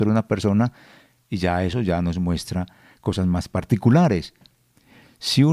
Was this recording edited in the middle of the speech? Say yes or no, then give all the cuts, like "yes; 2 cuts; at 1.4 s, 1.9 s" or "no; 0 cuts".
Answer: no; 0 cuts